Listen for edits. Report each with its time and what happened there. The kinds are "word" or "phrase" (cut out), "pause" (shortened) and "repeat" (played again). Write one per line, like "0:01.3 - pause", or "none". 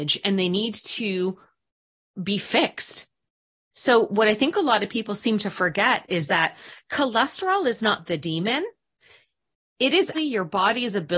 0:10.1 - word